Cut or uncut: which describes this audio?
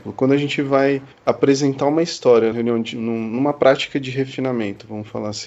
cut